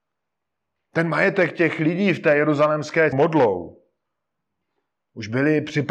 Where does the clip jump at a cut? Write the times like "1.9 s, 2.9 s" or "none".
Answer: 3.1 s